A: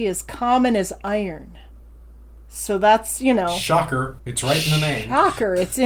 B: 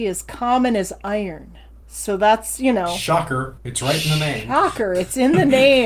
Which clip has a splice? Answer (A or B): B